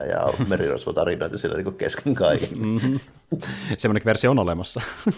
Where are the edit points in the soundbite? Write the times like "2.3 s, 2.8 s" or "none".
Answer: none